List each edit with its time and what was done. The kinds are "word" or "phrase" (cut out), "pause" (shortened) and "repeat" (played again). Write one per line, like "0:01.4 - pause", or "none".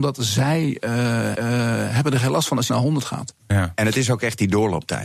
0:01.3 - repeat
0:02.7 - phrase

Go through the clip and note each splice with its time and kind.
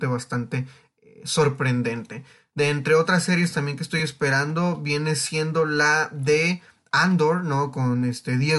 none

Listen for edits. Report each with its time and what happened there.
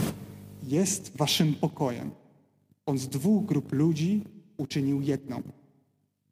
none

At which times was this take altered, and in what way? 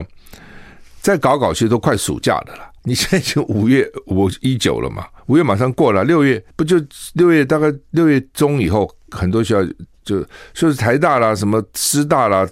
0:02.8 - pause
0:05.2 - pause
0:06.5 - pause

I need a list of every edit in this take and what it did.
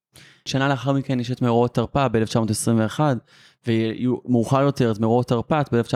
none

